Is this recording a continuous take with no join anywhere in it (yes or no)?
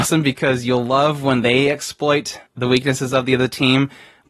no